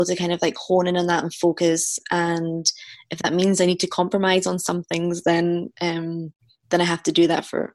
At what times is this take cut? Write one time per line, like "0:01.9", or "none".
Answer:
none